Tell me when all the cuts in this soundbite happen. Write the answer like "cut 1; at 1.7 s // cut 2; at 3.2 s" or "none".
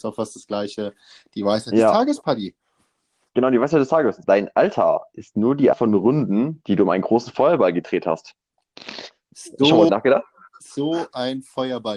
cut 1; at 4.2 s // cut 2; at 5.7 s // cut 3; at 9.9 s